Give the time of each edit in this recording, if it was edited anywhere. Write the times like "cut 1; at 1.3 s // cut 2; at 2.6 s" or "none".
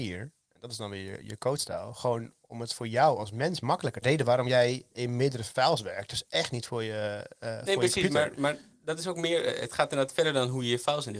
cut 1; at 4.0 s

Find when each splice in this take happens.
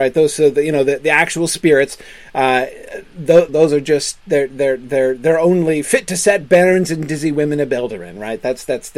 cut 1; at 3.5 s

